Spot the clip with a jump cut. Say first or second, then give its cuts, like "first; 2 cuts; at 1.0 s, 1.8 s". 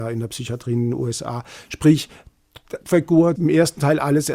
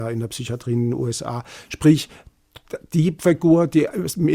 first; 2 cuts; at 2.8 s, 3.4 s